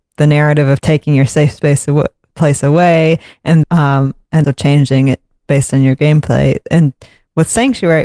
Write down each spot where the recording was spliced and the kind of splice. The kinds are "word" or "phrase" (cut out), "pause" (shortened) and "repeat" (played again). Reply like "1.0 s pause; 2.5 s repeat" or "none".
3.6 s word; 4.4 s word